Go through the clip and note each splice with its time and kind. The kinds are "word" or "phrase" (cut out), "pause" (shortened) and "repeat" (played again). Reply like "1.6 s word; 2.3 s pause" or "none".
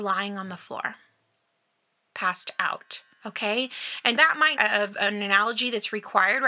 3.1 s pause; 4.2 s word; 4.6 s phrase